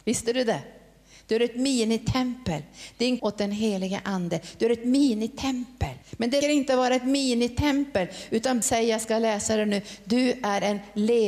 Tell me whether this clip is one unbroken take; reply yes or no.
no